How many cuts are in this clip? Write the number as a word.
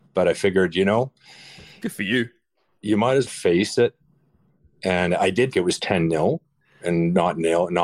two